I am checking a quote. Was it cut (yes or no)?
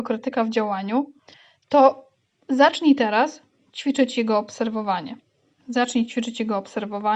no